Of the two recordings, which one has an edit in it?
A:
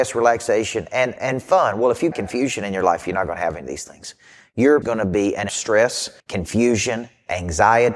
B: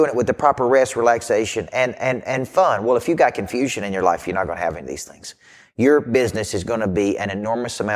A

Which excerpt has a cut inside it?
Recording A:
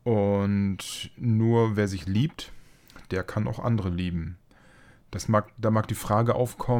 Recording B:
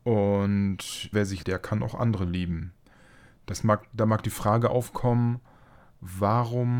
B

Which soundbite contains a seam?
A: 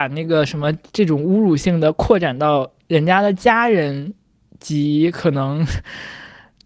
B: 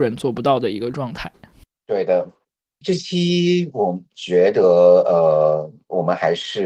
B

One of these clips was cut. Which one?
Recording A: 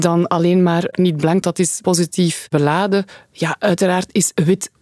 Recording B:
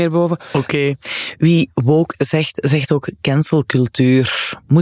A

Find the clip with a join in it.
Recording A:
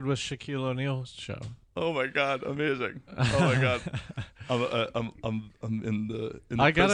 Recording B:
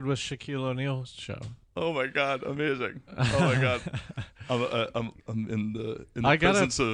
B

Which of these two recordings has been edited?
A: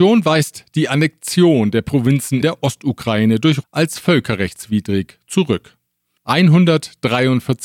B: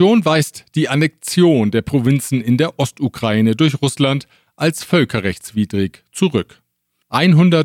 A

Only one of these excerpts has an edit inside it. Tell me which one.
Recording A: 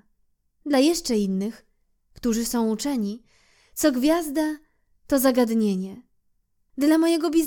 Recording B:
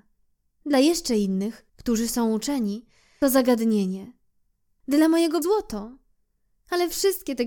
B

